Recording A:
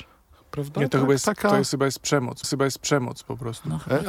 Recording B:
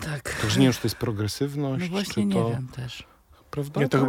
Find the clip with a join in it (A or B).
A